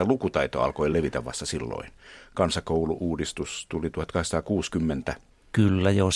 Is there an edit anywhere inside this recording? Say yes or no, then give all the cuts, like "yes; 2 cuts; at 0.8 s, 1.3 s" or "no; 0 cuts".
no; 0 cuts